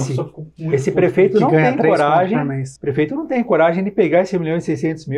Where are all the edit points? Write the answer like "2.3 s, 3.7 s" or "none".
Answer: 2.8 s